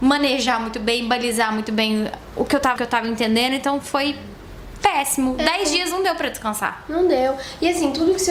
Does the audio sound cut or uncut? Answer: cut